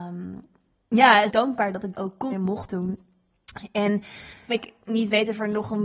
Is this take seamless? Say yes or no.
no